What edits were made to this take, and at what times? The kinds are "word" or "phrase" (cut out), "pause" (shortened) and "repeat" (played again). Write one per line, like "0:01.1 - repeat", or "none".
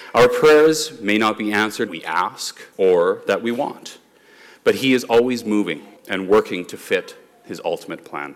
0:01.9 - phrase
0:02.7 - pause
0:06.0 - pause